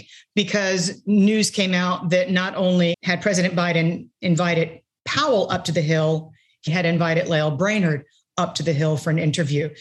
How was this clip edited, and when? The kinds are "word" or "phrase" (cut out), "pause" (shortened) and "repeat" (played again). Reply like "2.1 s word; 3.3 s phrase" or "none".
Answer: 2.9 s word; 6.7 s word